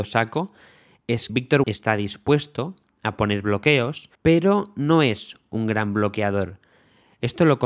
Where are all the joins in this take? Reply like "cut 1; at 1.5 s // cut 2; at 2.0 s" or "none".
cut 1; at 1.3 s // cut 2; at 1.6 s // cut 3; at 4.1 s